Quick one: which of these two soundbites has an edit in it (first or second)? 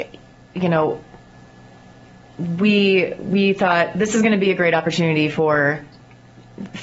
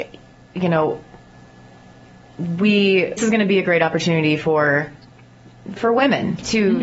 second